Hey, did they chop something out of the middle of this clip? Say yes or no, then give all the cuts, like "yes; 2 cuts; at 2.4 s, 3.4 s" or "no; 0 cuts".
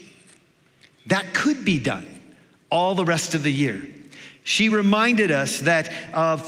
no; 0 cuts